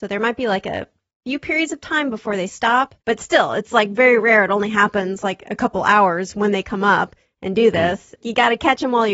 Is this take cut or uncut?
cut